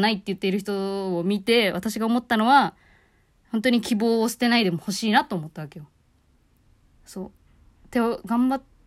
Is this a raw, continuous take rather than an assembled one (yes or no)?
yes